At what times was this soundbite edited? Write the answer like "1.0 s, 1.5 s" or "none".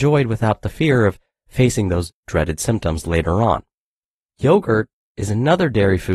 none